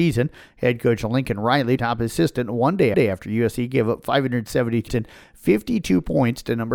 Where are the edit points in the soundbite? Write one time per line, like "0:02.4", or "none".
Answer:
0:01.8
0:02.9
0:04.9